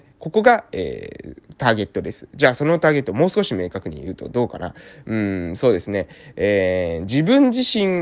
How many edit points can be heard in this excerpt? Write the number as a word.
zero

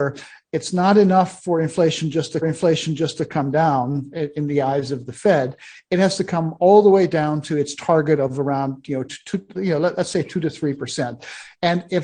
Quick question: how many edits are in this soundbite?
three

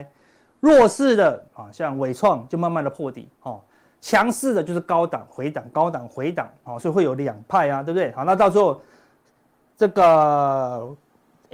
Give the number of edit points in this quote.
two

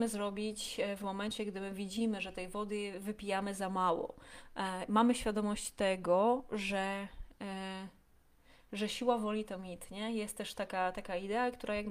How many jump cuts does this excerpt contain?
zero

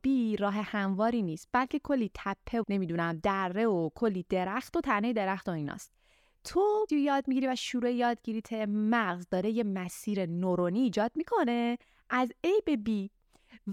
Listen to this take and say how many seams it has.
two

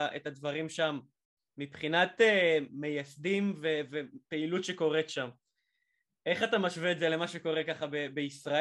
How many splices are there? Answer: zero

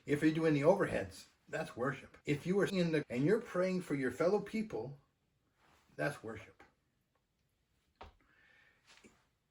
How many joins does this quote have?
four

